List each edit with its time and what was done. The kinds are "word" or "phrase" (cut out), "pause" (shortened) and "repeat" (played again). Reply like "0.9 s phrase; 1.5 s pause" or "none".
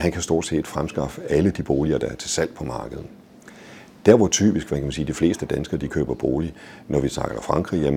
none